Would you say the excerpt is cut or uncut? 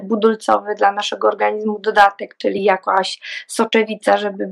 uncut